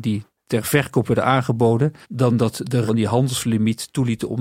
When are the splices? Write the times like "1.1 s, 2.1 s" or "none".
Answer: 2.0 s, 2.9 s